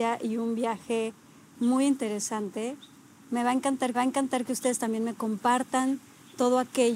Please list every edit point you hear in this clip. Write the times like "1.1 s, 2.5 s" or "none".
3.9 s